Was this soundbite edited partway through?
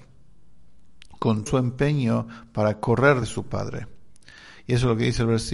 yes; 2 cuts; at 1.5 s, 3.2 s

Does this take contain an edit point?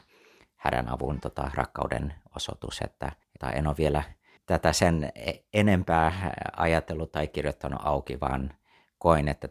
yes; 1 cut; at 3.2 s

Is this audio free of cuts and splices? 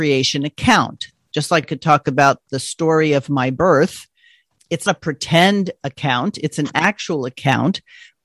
no; 2 cuts; at 1.6 s, 4.9 s

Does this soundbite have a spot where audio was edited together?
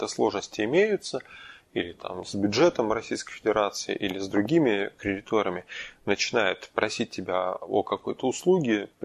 no; 0 cuts

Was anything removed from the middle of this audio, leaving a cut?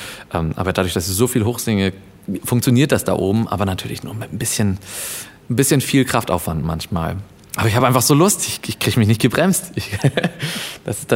no; 0 cuts

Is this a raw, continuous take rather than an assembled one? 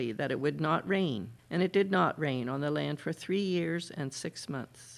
no; 1 cut; at 1.4 s

